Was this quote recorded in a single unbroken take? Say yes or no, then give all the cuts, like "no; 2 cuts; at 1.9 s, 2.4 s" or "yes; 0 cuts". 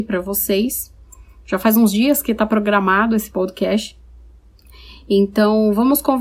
yes; 0 cuts